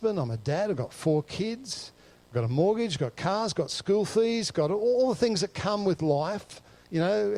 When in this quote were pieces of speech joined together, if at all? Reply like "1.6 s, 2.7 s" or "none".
none